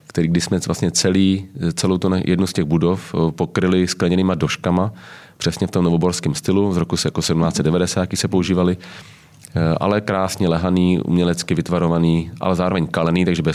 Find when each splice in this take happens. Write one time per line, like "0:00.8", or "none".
none